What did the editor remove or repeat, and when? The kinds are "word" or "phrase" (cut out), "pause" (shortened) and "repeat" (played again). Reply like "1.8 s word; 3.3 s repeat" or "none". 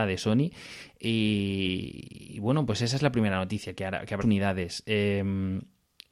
4.2 s word